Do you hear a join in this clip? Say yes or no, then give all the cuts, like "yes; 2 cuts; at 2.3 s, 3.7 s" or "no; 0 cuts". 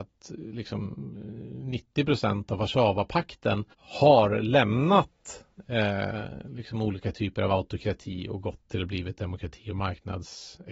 yes; 1 cut; at 3.7 s